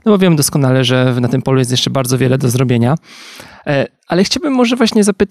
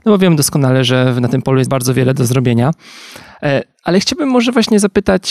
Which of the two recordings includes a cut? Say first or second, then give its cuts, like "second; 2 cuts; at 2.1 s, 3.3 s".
second; 1 cut; at 1.7 s